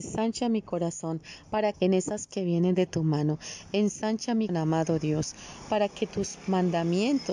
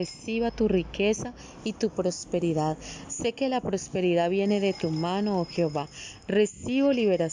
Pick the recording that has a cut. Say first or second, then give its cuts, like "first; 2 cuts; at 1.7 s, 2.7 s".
first; 3 cuts; at 1.7 s, 2.3 s, 4.5 s